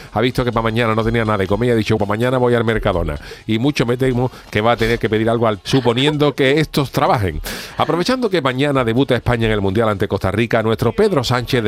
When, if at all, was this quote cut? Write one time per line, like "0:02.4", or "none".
0:02.0
0:05.6